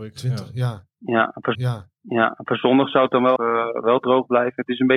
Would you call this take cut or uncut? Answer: cut